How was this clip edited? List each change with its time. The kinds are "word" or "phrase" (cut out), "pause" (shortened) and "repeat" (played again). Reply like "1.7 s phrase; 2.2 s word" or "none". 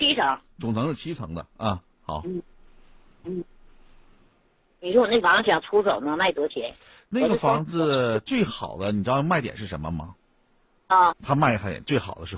3.2 s repeat; 11.1 s word